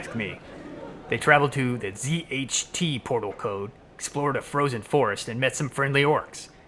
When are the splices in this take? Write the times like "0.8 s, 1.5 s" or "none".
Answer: none